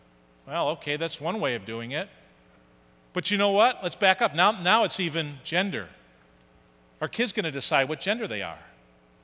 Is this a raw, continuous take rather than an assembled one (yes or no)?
yes